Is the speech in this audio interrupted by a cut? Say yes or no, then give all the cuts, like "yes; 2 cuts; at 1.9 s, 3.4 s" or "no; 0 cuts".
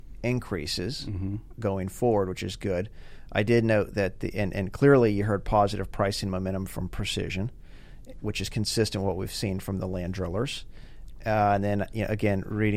no; 0 cuts